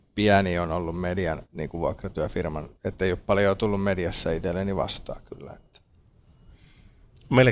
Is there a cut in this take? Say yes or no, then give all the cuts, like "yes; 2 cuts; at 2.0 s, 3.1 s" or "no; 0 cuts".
yes; 2 cuts; at 1.5 s, 2.8 s